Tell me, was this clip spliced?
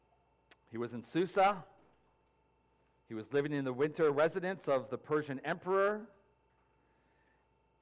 no; 0 cuts

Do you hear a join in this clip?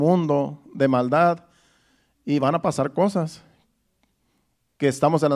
no; 0 cuts

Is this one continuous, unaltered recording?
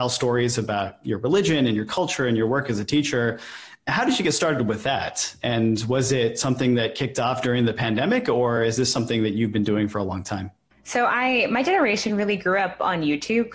yes; 0 cuts

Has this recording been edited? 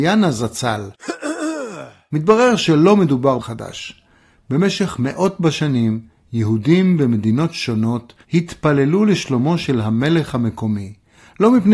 yes; 2 cuts; at 3.4 s, 8.2 s

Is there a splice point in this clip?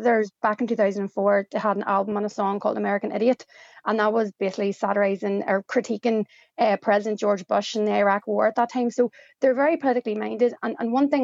no; 0 cuts

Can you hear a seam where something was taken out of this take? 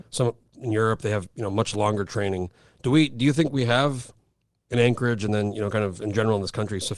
no; 0 cuts

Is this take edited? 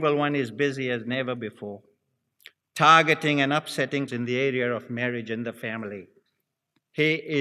yes; 1 cut; at 4.1 s

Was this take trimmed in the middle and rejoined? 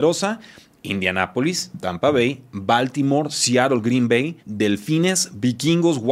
yes; 1 cut; at 4.4 s

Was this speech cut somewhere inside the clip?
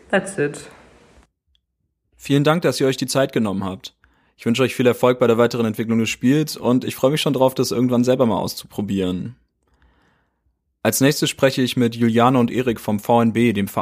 no; 0 cuts

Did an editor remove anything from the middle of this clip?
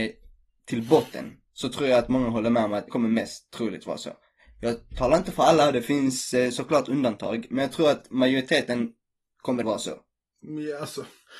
yes; 2 cuts; at 2.9 s, 9.6 s

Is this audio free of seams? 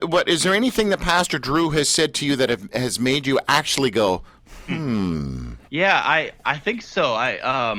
no; 1 cut; at 5.6 s

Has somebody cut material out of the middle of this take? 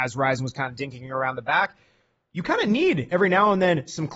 no; 0 cuts

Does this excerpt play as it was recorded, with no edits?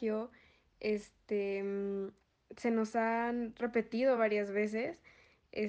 yes; 0 cuts

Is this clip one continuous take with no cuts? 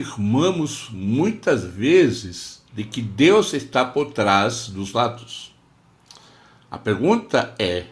no; 2 cuts; at 2.7 s, 4.9 s

